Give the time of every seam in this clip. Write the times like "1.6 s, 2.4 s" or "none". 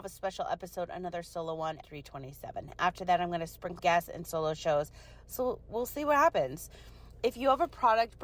1.8 s, 3.8 s